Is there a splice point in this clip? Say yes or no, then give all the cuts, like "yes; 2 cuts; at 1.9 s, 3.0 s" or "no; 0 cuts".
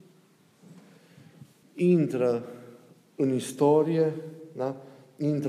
yes; 1 cut; at 1.6 s